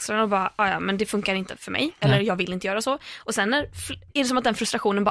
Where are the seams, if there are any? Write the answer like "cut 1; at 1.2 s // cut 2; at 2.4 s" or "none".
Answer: none

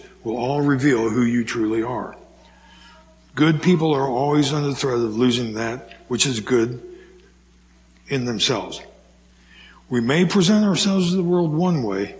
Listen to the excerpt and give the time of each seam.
none

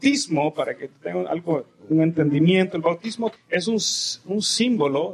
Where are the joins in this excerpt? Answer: cut 1; at 3.4 s

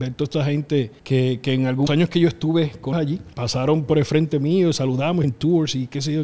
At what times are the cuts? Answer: cut 1; at 1.0 s // cut 2; at 1.9 s // cut 3; at 2.9 s // cut 4; at 3.3 s // cut 5; at 5.2 s

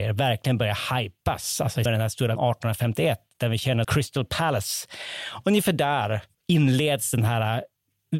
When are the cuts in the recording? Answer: cut 1; at 1.9 s // cut 2; at 2.4 s // cut 3; at 3.8 s // cut 4; at 6.3 s

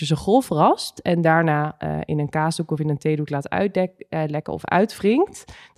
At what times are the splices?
none

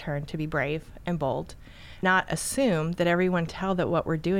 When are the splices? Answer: cut 1; at 2.0 s // cut 2; at 3.5 s

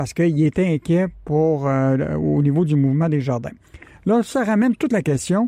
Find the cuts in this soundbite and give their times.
none

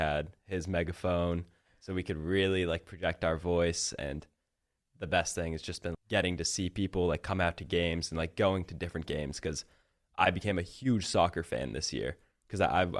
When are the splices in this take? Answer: cut 1; at 5.9 s

